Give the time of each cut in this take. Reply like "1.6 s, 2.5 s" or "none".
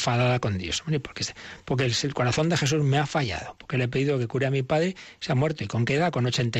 none